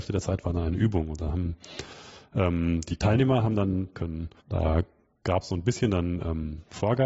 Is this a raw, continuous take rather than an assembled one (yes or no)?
no